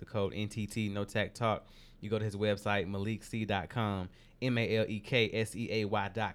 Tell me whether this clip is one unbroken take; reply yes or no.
yes